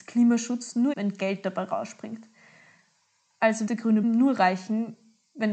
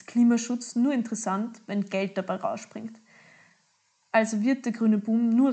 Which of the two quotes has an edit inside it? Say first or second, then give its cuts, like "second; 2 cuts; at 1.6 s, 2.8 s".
first; 3 cuts; at 0.9 s, 3.7 s, 4.0 s